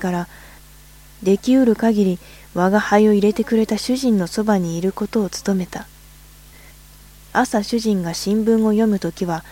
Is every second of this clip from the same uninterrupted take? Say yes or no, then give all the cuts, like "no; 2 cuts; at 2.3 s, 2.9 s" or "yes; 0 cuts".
yes; 0 cuts